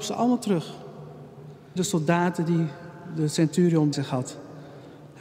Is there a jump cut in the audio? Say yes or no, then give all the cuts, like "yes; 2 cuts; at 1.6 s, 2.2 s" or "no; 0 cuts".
yes; 2 cuts; at 1.8 s, 3.9 s